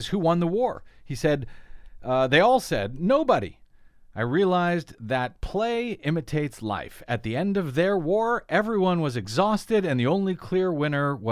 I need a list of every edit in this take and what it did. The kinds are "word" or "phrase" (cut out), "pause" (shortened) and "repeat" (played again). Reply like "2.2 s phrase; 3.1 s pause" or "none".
none